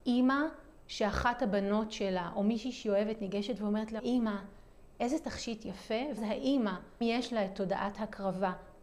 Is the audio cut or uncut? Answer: cut